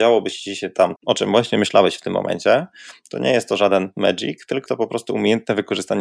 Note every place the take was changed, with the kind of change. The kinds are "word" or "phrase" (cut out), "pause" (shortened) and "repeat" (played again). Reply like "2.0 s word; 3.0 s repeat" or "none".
1.0 s word; 4.7 s word